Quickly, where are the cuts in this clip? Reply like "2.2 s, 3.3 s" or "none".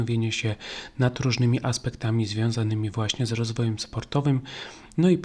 none